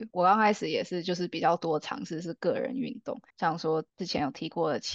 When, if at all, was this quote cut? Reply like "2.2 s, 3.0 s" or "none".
3.3 s

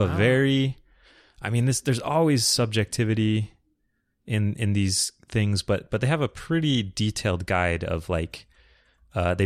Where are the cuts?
none

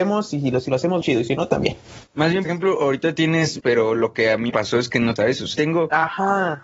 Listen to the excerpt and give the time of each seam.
1.0 s, 2.4 s, 3.6 s, 4.5 s, 5.2 s, 5.5 s

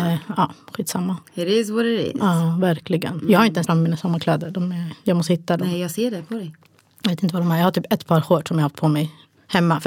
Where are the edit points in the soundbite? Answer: 3.7 s

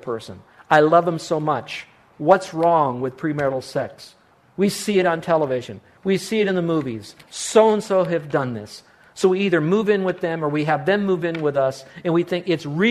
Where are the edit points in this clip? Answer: none

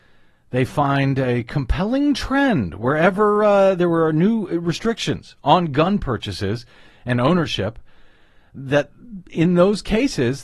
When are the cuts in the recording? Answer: none

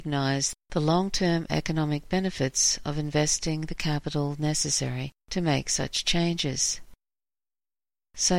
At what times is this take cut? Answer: 5.2 s

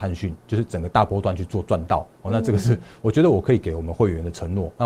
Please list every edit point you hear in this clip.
none

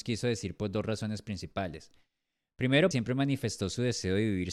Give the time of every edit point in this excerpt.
2.9 s

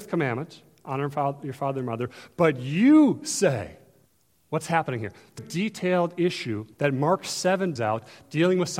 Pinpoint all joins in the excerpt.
4.1 s, 5.4 s, 6.7 s, 7.8 s

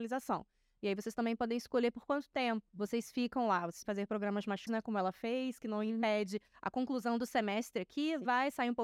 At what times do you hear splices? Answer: 2.7 s, 3.8 s, 4.7 s

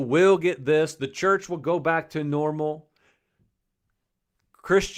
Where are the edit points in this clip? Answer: none

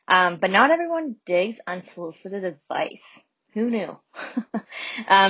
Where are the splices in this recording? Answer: none

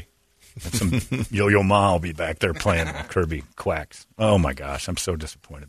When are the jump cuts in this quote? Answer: none

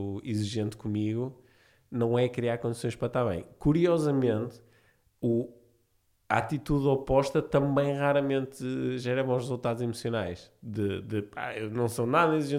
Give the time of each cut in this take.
none

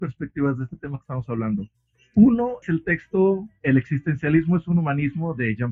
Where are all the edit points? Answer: 2.6 s

